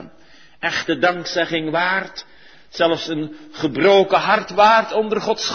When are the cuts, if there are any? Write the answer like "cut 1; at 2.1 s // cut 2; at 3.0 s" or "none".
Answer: none